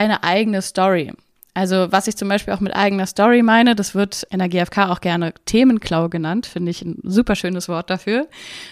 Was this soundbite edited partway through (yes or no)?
no